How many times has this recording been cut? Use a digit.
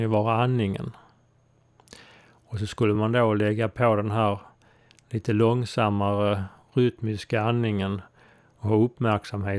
0